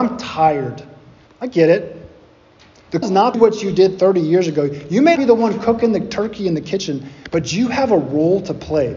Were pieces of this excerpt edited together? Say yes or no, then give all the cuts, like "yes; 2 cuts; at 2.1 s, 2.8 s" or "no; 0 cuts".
yes; 4 cuts; at 1.3 s, 3.0 s, 3.3 s, 5.2 s